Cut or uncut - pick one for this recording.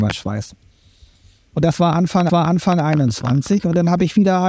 cut